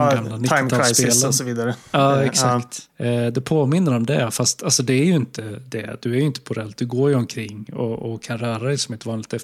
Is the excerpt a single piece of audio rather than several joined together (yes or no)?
no